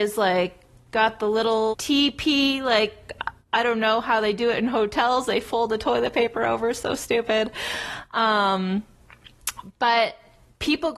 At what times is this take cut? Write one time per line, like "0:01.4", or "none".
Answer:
0:01.7